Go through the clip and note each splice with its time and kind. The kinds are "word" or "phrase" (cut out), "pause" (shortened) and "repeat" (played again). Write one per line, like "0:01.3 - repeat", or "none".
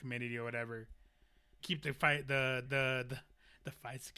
0:01.6 - word
0:02.7 - repeat